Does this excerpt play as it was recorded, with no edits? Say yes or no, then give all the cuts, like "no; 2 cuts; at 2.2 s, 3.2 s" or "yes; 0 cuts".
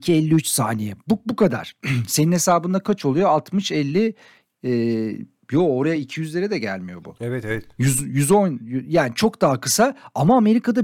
yes; 0 cuts